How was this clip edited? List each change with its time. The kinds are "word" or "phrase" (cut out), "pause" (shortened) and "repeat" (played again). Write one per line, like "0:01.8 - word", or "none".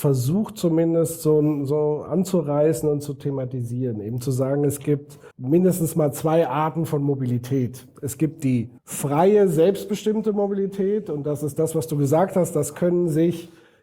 0:05.3 - pause
0:08.8 - pause

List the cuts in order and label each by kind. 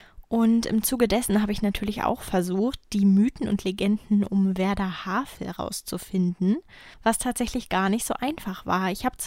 0:06.9 - pause

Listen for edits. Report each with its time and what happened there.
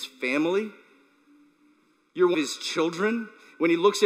0:02.3 - word

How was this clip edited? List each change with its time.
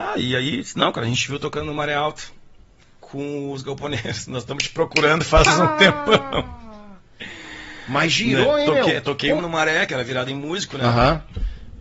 0:09.4 - word

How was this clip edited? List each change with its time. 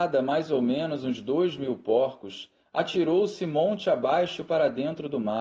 none

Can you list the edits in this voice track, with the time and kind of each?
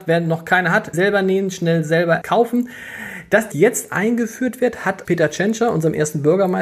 0:00.9 - word
0:02.2 - word
0:03.5 - word
0:05.1 - word

